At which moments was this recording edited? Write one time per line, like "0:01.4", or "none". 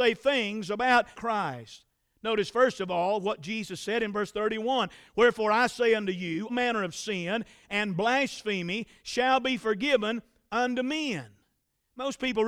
0:01.1
0:06.5

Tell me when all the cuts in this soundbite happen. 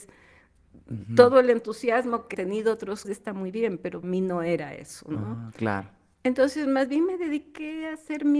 0:02.3
0:03.0
0:04.0

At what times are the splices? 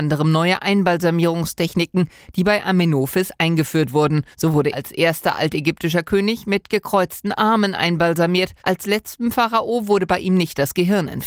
0:04.3
0:04.7
0:08.6

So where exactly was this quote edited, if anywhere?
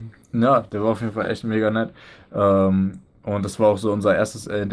none

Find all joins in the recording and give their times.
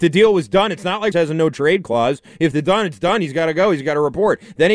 0:01.1
0:02.6

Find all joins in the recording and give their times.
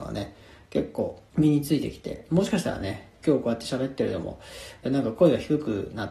0:01.3

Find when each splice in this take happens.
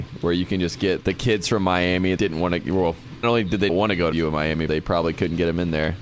0:01.0
0:02.2
0:03.2
0:03.7
0:04.1
0:04.7

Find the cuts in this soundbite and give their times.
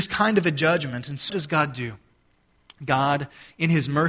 0:01.3

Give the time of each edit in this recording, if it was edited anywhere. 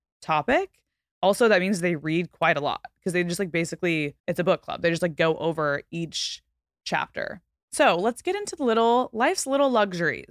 0:04.2
0:07.6

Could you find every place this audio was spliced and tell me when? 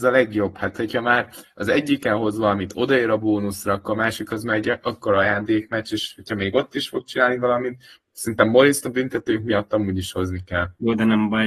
none

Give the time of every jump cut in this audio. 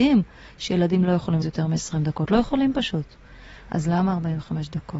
0:01.4

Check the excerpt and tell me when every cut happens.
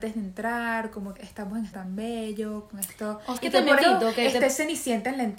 0:01.2
0:01.7
0:03.4
0:03.8

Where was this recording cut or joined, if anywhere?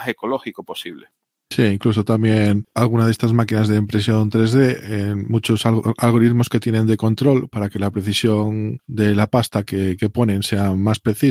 none

